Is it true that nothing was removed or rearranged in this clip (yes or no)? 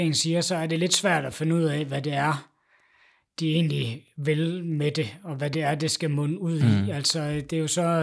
yes